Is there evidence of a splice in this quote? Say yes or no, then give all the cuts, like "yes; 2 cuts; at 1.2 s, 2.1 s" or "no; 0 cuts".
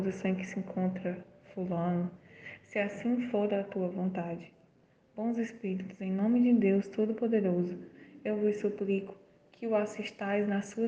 no; 0 cuts